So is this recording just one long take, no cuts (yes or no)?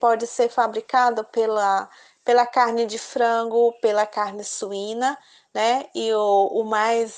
yes